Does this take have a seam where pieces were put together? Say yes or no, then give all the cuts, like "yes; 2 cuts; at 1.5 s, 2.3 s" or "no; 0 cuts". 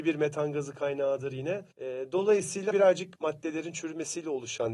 yes; 3 cuts; at 1.7 s, 2.7 s, 3.2 s